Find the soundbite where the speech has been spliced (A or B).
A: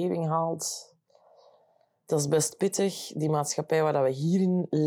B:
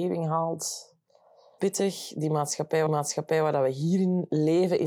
B